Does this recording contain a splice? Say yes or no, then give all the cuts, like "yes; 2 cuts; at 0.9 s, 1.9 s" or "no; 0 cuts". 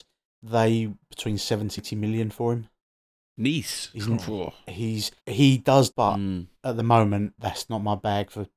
yes; 5 cuts; at 1.0 s, 1.8 s, 5.2 s, 5.9 s, 6.6 s